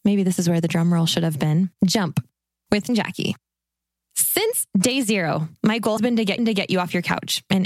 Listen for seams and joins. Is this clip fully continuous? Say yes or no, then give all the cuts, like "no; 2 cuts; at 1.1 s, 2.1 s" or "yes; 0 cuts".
no; 5 cuts; at 1.8 s, 2.9 s, 5.6 s, 6.0 s, 6.4 s